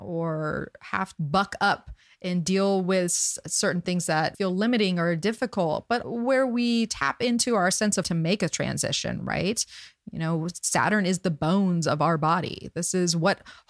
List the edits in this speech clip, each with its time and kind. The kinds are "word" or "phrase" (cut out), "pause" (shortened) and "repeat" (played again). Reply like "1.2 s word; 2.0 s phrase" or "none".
1.1 s word; 4.3 s word; 6.0 s word; 8.0 s word